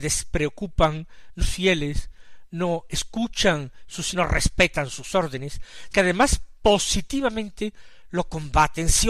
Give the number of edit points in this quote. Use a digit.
3